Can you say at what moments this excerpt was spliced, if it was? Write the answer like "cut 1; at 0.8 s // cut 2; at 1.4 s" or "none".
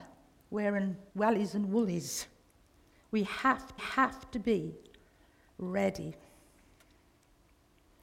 cut 1; at 1.1 s // cut 2; at 3.8 s